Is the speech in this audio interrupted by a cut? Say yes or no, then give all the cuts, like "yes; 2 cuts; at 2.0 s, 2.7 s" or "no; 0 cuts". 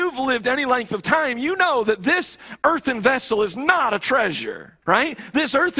yes; 1 cut; at 4.8 s